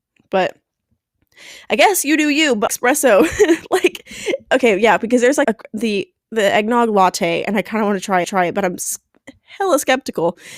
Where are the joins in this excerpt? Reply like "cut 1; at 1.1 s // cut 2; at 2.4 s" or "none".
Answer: cut 1; at 2.7 s // cut 2; at 5.4 s // cut 3; at 8.2 s